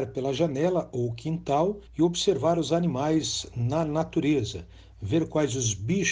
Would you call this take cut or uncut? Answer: cut